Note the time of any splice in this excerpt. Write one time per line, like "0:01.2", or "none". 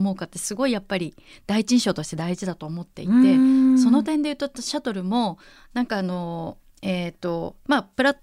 none